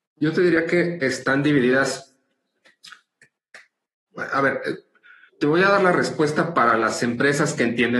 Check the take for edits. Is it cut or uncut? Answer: cut